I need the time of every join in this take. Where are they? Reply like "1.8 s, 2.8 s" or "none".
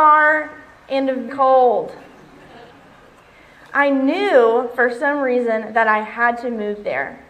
1.3 s